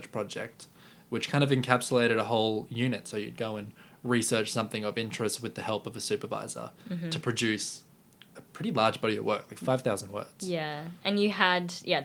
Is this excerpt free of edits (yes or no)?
yes